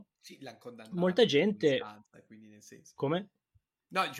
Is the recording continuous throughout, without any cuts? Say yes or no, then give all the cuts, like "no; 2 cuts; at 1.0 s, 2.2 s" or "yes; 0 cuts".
yes; 0 cuts